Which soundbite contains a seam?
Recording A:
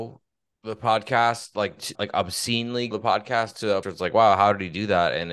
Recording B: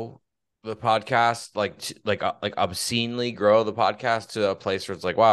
A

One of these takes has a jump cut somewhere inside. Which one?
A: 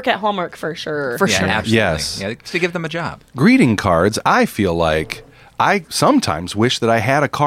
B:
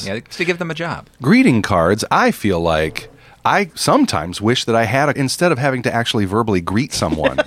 B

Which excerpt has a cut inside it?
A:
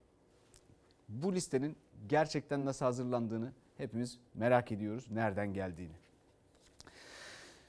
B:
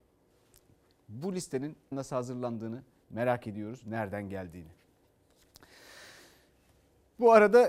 B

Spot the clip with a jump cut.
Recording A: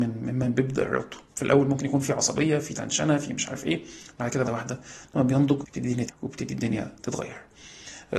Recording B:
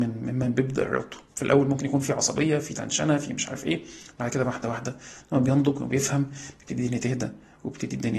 A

